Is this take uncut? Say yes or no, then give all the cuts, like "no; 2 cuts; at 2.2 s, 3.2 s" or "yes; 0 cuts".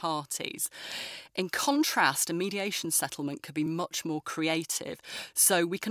yes; 0 cuts